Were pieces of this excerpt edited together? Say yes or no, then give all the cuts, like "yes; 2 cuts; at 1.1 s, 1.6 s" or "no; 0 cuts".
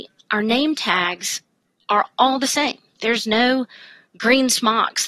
no; 0 cuts